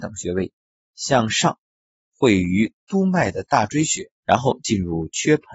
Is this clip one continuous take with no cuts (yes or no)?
no